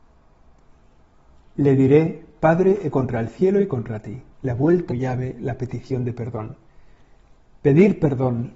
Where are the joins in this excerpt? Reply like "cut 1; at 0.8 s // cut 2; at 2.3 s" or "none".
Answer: cut 1; at 2.9 s // cut 2; at 4.3 s // cut 3; at 4.9 s

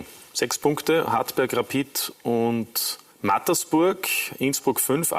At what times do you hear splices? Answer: cut 1; at 1.1 s // cut 2; at 3.1 s

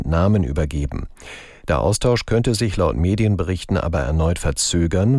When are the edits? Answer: none

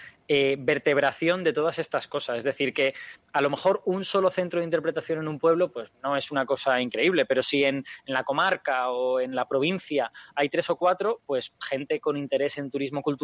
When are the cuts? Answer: cut 1; at 5.9 s

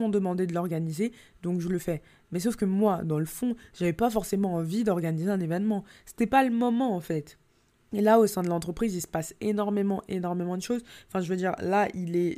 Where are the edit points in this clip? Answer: none

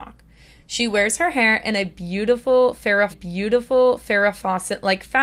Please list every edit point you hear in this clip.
cut 1; at 3.1 s

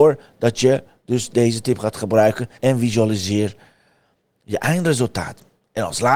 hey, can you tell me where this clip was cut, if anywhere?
cut 1; at 2.5 s

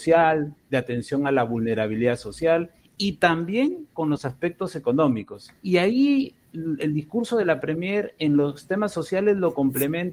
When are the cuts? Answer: cut 1; at 5.6 s

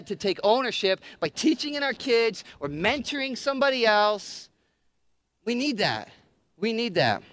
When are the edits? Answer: none

